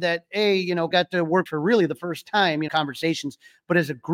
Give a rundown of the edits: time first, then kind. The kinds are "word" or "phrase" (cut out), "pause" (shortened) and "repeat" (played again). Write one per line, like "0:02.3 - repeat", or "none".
0:00.9 - word
0:01.5 - phrase
0:02.7 - phrase